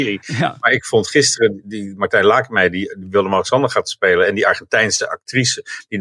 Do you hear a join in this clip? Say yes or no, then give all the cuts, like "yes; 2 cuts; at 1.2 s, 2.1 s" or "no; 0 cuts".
no; 0 cuts